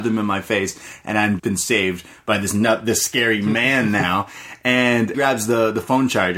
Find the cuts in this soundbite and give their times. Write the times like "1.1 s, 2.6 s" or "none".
1.4 s, 5.1 s